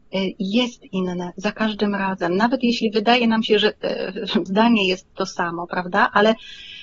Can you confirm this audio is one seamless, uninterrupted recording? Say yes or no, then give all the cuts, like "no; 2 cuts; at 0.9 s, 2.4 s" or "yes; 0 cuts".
no; 1 cut; at 4.5 s